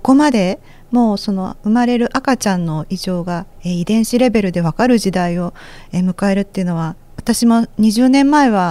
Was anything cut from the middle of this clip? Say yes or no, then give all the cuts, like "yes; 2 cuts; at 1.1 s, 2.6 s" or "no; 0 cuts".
yes; 2 cuts; at 3.5 s, 7.1 s